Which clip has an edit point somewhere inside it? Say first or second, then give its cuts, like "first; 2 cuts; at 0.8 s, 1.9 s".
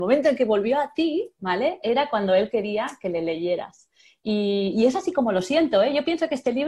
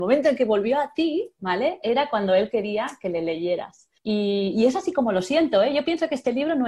second; 1 cut; at 4.0 s